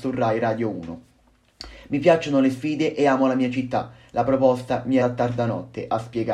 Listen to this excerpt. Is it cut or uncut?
cut